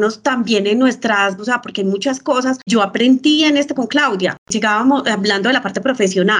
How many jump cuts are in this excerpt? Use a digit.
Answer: 3